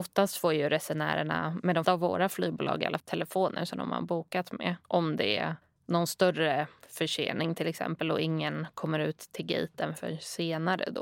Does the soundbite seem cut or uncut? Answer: cut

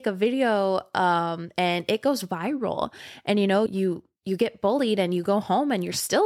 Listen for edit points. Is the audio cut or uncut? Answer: cut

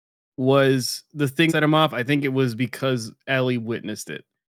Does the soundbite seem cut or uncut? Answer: cut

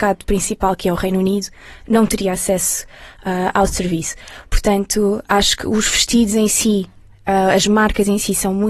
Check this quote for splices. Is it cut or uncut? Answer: uncut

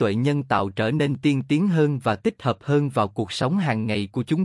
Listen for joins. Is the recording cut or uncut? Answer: uncut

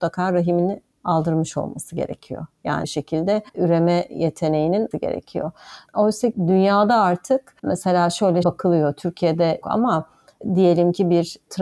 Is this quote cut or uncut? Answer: cut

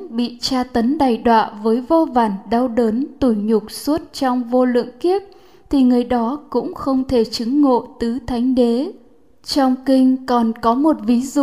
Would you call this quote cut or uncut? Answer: uncut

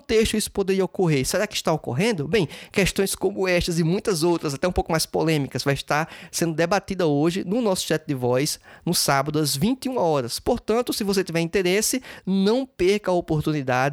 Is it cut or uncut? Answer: uncut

